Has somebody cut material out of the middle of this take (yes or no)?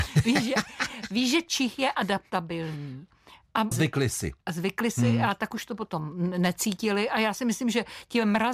yes